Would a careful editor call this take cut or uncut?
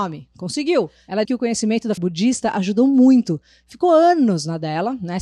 cut